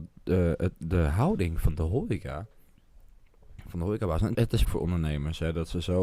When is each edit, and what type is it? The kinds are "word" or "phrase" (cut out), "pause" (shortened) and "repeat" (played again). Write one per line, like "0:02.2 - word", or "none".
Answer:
0:04.3 - word
0:04.6 - word